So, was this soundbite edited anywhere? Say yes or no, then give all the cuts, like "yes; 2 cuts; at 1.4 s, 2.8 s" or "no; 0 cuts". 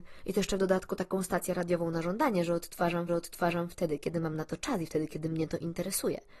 yes; 1 cut; at 3.1 s